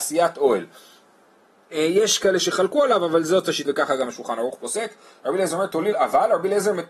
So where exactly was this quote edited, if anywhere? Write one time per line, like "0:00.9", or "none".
0:01.7
0:03.7
0:05.9

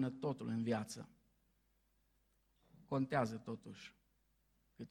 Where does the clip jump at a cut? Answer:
none

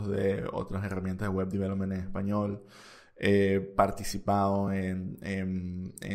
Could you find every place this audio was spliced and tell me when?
none

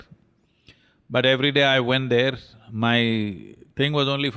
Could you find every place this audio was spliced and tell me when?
none

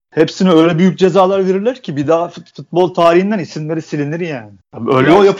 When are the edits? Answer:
none

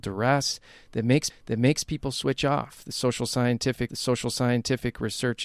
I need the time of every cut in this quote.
0:01.3
0:03.9

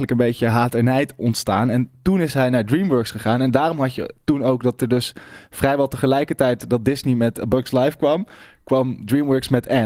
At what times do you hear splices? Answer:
none

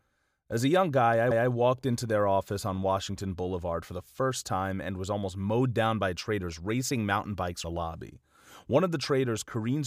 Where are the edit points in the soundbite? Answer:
0:01.3
0:07.6

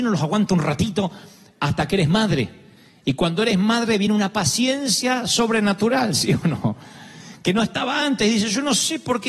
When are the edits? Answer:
none

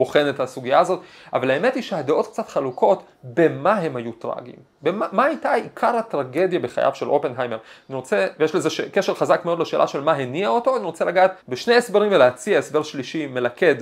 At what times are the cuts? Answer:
0:11.4

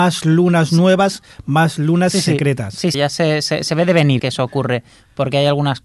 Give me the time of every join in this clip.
0:02.9
0:04.2

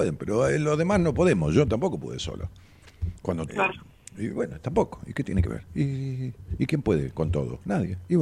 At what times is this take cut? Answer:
0:03.5

